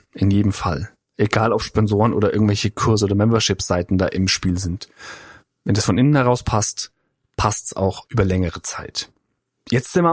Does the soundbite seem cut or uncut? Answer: uncut